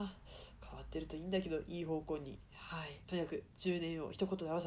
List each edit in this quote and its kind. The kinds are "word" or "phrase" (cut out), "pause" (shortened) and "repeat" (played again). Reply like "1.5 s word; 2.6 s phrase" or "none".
3.0 s pause